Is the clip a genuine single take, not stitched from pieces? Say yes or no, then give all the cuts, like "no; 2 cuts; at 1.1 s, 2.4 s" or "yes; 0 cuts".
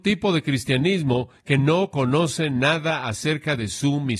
yes; 0 cuts